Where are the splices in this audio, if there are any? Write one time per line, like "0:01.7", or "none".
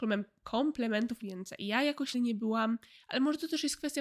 0:01.2
0:02.1